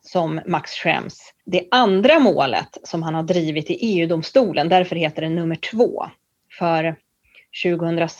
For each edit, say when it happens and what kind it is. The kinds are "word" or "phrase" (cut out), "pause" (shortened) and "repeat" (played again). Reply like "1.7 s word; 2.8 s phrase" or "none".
1.4 s pause